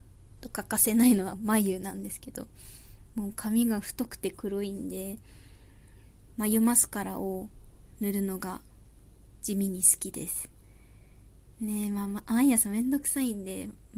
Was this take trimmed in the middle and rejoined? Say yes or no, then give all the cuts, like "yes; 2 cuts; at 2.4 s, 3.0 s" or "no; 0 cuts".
yes; 1 cut; at 9.4 s